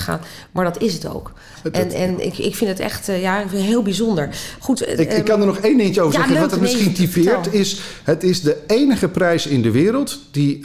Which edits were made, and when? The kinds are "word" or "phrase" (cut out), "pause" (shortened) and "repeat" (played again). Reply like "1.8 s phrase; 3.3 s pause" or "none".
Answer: none